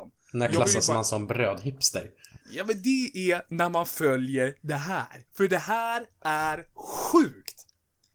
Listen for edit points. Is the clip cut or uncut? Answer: cut